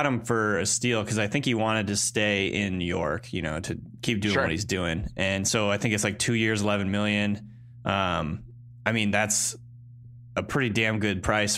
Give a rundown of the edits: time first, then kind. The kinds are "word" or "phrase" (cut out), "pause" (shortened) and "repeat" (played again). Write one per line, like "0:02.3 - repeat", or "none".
none